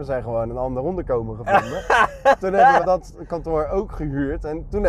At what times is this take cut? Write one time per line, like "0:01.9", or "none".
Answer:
0:02.8